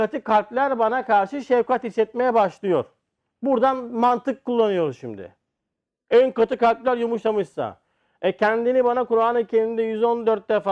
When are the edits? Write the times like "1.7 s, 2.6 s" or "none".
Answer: none

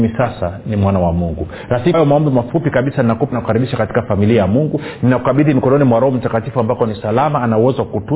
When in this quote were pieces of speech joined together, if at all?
1.9 s, 3.3 s

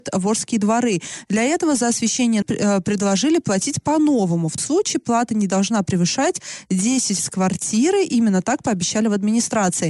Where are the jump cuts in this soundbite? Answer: 2.4 s, 4.6 s, 7.2 s

